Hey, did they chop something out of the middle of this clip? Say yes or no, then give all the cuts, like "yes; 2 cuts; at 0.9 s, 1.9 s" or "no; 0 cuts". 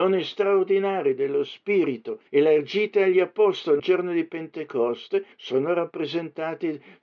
yes; 3 cuts; at 2.3 s, 3.8 s, 5.3 s